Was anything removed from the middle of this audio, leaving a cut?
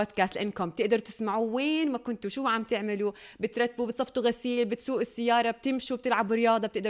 no; 0 cuts

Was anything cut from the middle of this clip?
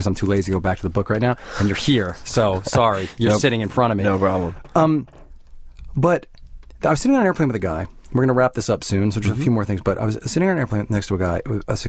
no; 0 cuts

